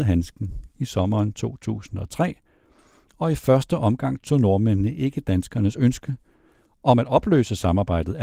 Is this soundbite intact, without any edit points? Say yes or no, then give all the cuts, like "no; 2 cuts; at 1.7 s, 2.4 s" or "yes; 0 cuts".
yes; 0 cuts